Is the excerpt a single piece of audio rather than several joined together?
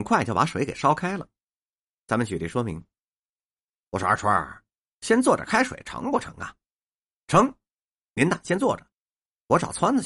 yes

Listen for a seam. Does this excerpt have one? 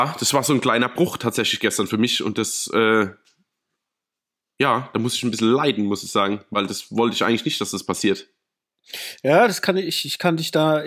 no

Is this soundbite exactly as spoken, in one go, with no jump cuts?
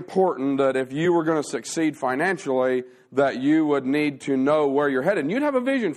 yes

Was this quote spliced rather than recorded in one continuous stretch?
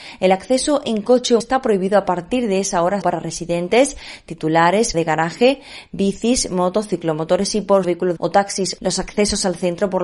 yes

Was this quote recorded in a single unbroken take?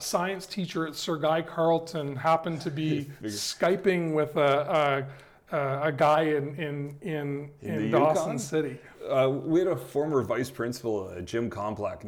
yes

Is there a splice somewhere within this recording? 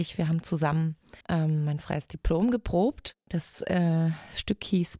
yes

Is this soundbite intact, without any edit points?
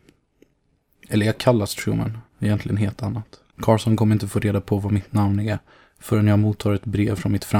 no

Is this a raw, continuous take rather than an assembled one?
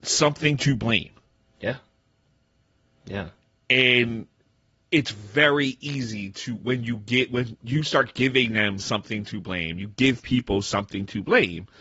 yes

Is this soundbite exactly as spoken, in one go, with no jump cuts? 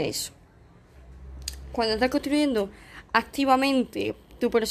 yes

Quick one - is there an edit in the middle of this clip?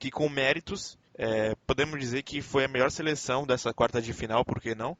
yes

